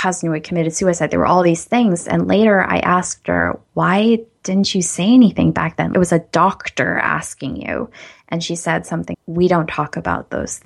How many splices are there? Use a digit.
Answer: 2